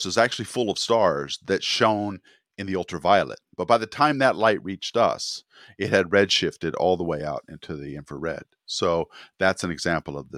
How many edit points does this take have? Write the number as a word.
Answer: zero